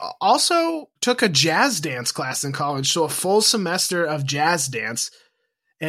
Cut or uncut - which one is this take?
cut